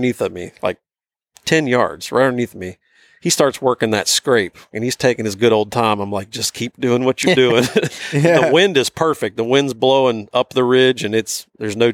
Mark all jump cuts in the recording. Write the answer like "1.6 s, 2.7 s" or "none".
none